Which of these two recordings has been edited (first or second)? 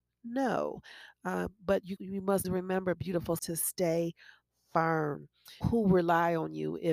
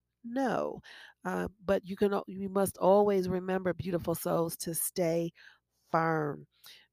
first